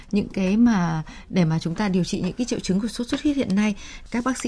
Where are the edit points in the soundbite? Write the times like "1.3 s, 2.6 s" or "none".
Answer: none